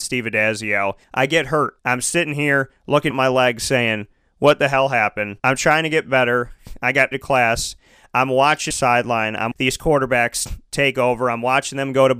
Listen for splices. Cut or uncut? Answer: cut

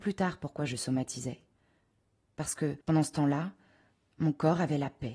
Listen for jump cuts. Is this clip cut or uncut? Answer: cut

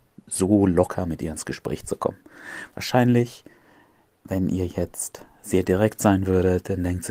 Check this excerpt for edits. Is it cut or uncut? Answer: uncut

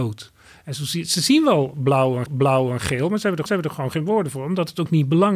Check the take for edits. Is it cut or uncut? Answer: cut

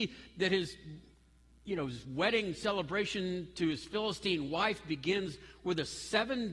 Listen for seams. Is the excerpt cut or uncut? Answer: uncut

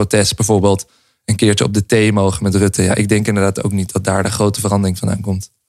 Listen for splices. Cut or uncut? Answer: uncut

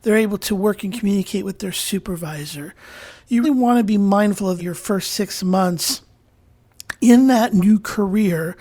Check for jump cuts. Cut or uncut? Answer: cut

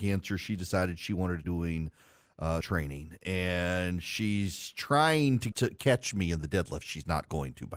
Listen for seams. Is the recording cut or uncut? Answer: cut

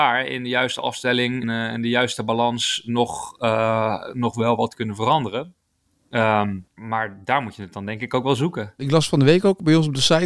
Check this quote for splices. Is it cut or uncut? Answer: cut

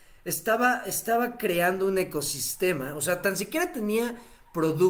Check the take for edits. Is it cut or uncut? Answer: uncut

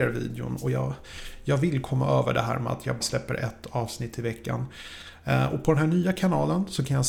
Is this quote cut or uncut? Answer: cut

